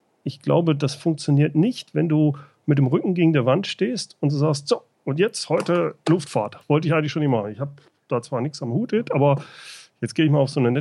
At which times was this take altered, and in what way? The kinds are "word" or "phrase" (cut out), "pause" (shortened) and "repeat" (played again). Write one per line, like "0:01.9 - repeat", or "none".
none